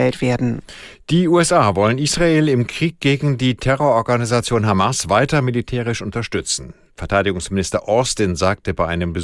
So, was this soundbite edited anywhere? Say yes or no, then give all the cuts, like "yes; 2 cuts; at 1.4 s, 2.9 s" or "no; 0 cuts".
no; 0 cuts